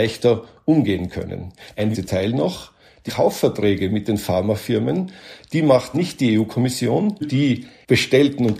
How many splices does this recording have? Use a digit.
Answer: 4